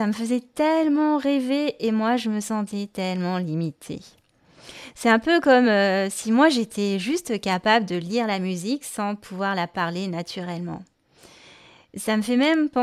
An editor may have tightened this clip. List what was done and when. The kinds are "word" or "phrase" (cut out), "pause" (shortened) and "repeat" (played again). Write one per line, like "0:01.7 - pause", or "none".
none